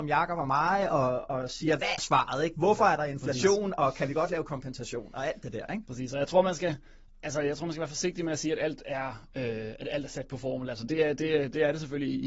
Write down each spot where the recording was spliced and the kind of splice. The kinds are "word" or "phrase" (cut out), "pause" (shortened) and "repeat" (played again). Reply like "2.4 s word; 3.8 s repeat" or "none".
2.0 s word